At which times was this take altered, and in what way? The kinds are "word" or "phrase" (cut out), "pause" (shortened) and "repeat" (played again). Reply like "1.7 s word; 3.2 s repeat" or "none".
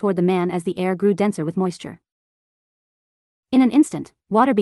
none